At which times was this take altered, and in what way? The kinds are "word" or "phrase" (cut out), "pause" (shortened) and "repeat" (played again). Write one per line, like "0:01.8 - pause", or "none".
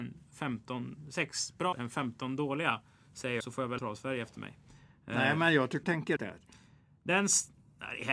0:01.7 - word
0:03.4 - word
0:03.8 - word
0:05.8 - word
0:06.2 - word